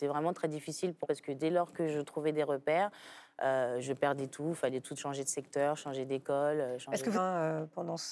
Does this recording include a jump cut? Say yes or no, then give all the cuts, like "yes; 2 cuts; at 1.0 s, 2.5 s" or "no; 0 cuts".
yes; 3 cuts; at 1.0 s, 5.0 s, 7.1 s